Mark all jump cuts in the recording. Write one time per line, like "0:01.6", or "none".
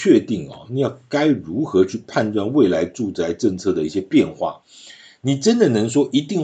none